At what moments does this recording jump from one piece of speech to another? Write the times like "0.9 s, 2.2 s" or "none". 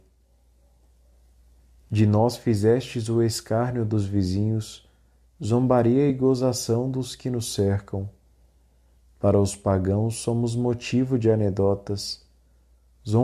none

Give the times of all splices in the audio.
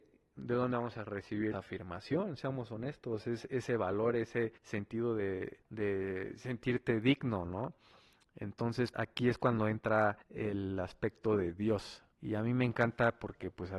1.5 s, 4.6 s, 5.6 s, 8.9 s, 10.2 s, 12.1 s

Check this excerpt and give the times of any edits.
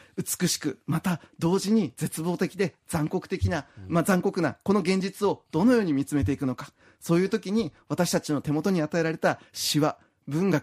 none

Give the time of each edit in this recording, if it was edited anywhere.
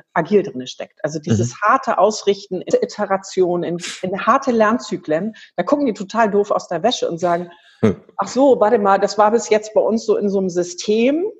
2.7 s

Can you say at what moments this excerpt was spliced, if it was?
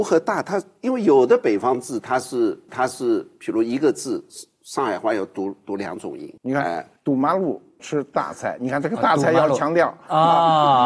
2.7 s, 6.4 s, 7.8 s

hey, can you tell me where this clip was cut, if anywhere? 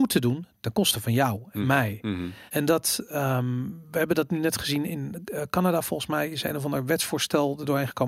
2.5 s, 4.9 s

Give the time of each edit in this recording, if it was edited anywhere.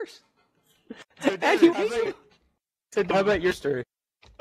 1.1 s, 1.7 s, 2.1 s, 3.1 s

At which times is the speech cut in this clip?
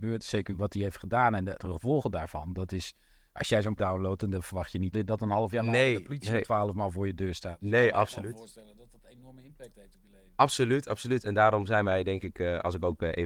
3.8 s, 4.9 s

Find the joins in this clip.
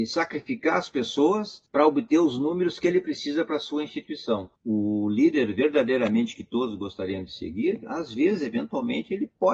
1.7 s, 4.6 s

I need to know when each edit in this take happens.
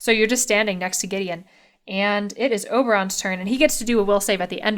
none

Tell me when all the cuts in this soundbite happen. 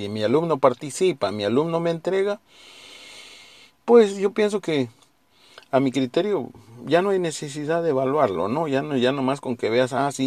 none

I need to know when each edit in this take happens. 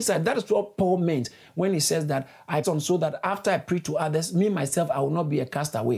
2.6 s

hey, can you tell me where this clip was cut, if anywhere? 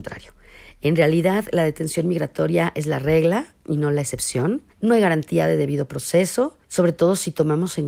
4.7 s, 6.6 s

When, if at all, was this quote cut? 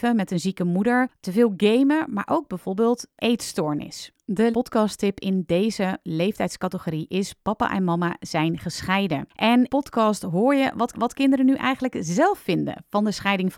1.2 s, 3.2 s, 4.5 s, 9.7 s, 10.9 s

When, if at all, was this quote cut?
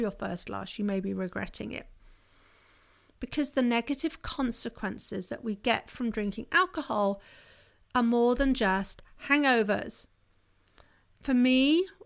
none

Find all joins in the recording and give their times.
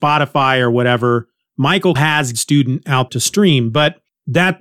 2.0 s, 2.3 s, 3.1 s

